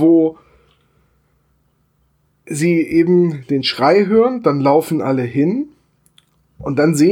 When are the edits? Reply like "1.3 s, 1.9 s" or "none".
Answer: none